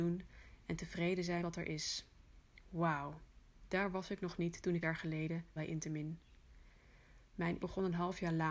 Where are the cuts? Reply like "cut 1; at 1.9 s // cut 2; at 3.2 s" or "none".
cut 1; at 1.4 s // cut 2; at 4.8 s // cut 3; at 5.6 s // cut 4; at 7.6 s